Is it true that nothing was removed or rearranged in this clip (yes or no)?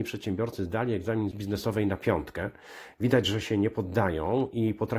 no